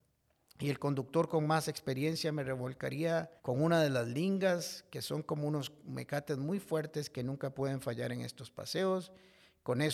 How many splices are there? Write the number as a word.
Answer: one